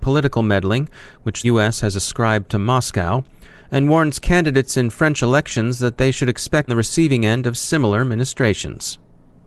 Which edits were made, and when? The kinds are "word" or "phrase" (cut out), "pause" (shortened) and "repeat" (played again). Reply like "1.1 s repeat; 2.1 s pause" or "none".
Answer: 1.4 s word; 6.7 s phrase